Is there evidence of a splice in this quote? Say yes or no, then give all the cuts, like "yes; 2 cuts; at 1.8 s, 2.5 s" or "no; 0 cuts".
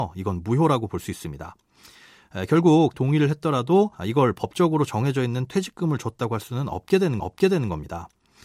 yes; 3 cuts; at 2.9 s, 3.9 s, 7.2 s